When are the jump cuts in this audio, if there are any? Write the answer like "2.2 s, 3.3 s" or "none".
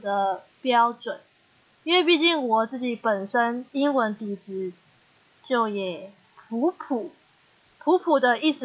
3.7 s